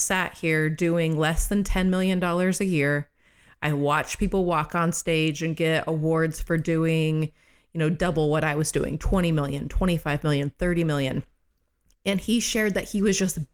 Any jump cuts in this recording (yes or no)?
no